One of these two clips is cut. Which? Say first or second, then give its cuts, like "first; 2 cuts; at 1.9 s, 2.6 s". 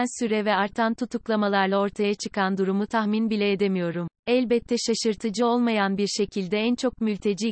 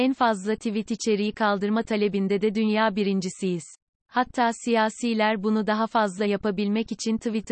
first; 1 cut; at 4.2 s